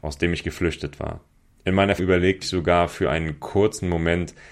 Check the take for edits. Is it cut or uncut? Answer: cut